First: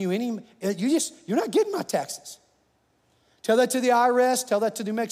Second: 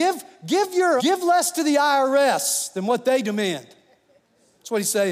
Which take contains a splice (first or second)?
second